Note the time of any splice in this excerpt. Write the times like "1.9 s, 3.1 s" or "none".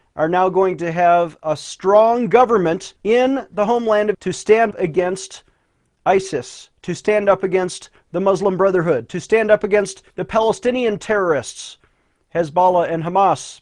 3.0 s, 4.1 s, 4.7 s, 10.1 s